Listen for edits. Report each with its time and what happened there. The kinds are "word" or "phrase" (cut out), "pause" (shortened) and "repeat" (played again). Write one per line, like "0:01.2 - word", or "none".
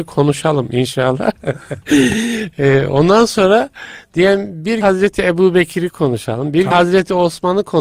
0:04.8 - word
0:06.7 - word